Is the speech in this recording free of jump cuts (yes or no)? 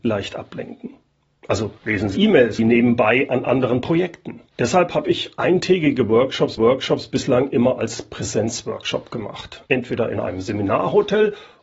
no